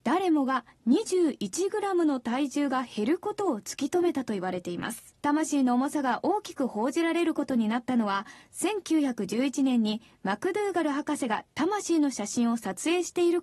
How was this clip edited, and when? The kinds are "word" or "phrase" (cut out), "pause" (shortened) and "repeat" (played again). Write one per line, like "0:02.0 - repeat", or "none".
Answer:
0:05.2 - pause